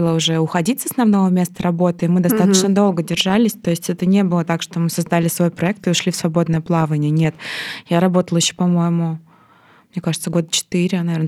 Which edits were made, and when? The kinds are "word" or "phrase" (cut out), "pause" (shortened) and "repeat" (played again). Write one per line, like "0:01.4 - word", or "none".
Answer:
none